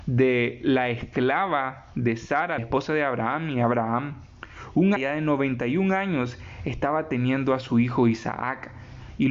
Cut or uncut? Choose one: cut